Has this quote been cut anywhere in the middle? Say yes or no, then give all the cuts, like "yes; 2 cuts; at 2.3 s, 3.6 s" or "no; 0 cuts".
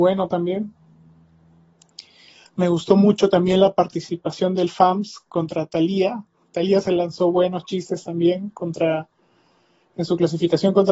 no; 0 cuts